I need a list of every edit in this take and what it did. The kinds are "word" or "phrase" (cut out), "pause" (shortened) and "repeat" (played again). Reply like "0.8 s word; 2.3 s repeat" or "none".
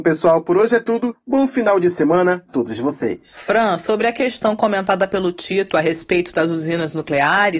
2.5 s word